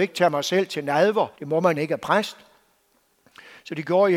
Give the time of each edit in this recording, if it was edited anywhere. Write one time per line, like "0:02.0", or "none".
0:01.3
0:01.8